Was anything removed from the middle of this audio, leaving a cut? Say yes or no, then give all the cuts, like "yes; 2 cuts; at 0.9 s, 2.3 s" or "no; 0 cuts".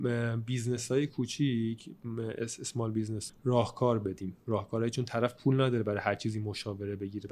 yes; 1 cut; at 3.3 s